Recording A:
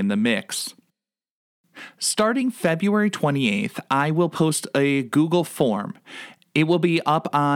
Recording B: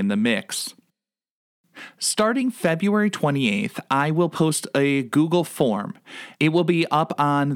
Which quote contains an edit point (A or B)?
B